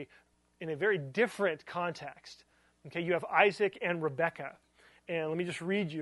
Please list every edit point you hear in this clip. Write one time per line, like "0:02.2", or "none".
none